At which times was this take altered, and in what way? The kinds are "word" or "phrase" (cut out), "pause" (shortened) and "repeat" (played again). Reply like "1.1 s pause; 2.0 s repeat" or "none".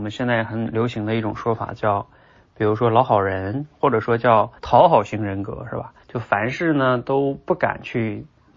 4.6 s pause; 6.0 s pause